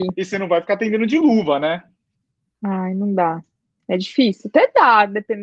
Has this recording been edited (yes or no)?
no